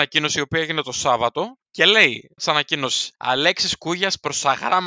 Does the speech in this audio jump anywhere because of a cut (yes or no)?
yes